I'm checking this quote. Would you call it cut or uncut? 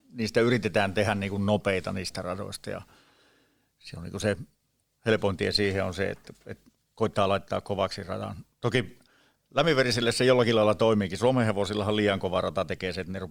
uncut